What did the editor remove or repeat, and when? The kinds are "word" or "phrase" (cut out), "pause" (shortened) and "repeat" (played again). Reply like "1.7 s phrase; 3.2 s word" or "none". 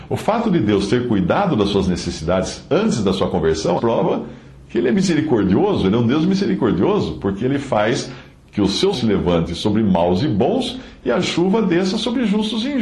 3.8 s word; 8.9 s word